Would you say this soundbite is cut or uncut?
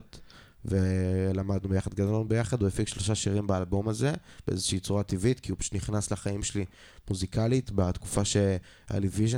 uncut